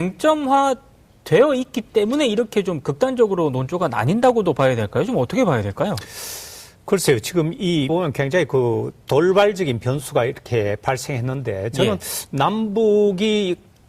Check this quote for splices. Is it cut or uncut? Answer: cut